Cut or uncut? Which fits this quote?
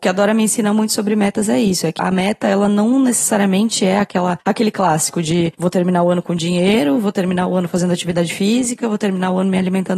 cut